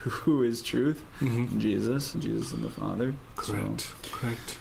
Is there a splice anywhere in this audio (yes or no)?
yes